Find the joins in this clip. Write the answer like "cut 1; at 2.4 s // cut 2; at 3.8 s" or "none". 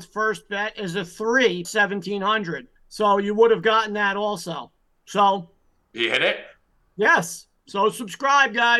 cut 1; at 1.6 s // cut 2; at 2.8 s